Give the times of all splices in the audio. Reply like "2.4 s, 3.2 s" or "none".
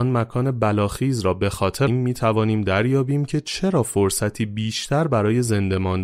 1.9 s